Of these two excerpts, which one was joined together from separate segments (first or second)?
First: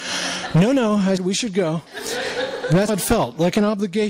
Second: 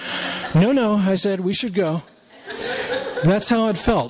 first